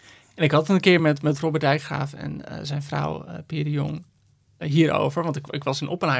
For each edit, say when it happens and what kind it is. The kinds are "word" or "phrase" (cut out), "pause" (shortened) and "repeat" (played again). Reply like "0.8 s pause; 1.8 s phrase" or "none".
none